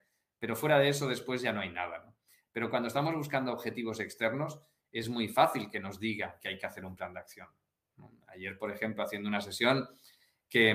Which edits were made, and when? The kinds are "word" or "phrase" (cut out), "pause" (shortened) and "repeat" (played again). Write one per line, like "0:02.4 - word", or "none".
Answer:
none